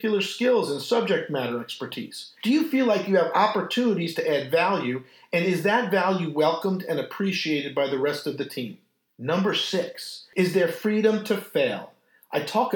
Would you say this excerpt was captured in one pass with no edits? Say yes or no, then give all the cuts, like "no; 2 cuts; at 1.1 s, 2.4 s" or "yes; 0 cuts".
yes; 0 cuts